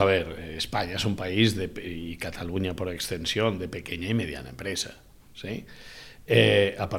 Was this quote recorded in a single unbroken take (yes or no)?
yes